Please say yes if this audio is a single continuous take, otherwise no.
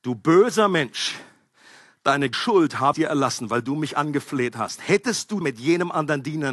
no